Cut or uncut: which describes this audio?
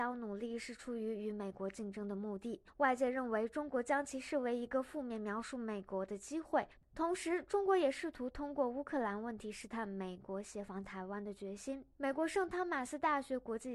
cut